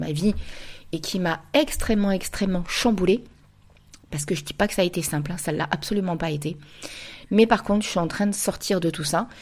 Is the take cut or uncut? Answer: uncut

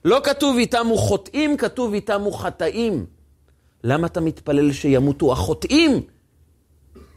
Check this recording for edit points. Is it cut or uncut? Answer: uncut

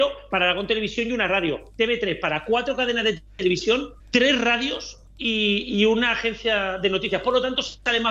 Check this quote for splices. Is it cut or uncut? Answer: cut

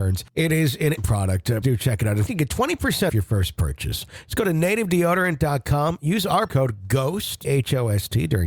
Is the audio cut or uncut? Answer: cut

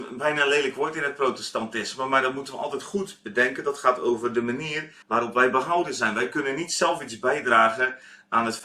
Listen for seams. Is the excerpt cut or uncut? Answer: cut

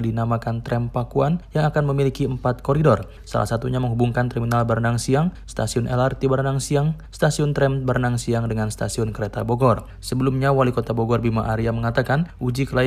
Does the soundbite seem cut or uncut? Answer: uncut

